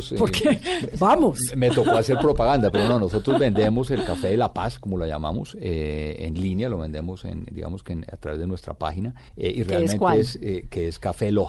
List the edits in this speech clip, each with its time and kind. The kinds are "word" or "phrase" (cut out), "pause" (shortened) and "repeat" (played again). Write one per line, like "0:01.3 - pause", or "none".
0:09.3 - pause